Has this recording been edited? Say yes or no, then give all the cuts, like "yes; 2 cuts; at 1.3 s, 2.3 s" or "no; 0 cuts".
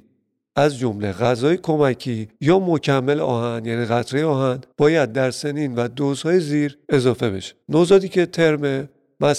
yes; 4 cuts; at 2.3 s, 4.7 s, 6.8 s, 7.6 s